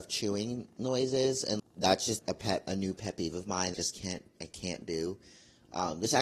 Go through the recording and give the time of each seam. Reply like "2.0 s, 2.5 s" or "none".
1.6 s, 2.2 s, 3.7 s